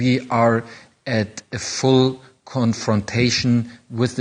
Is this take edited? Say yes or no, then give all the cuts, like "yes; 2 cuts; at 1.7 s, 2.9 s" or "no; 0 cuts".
no; 0 cuts